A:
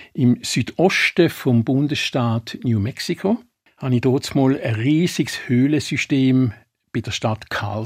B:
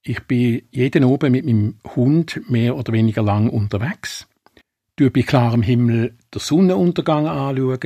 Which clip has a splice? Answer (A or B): B